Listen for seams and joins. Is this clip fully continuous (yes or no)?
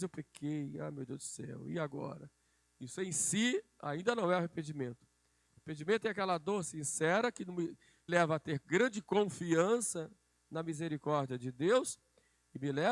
no